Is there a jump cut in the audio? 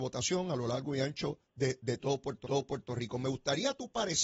yes; 2 cuts; at 1.4 s, 2.4 s

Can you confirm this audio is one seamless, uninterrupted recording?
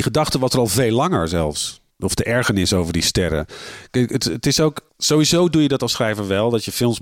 no; 2 cuts; at 1.9 s, 4.9 s

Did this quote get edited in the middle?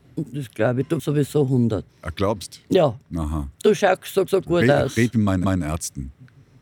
yes; 4 cuts; at 1.0 s, 1.9 s, 4.3 s, 5.4 s

